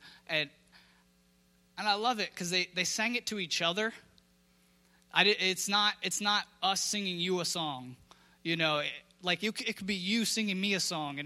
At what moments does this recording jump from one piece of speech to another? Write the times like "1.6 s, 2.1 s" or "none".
none